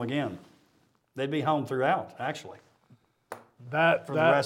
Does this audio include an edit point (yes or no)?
no